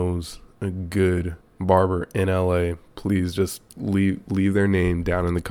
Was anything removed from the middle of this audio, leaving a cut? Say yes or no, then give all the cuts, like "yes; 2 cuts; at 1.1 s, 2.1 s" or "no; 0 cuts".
yes; 2 cuts; at 1.4 s, 3.7 s